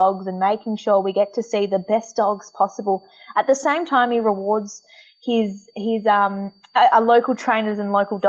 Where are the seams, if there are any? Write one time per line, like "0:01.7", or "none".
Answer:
none